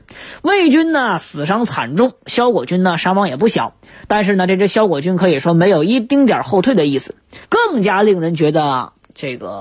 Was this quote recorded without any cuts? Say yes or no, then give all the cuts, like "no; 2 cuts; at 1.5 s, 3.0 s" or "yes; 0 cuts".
no; 1 cut; at 7.4 s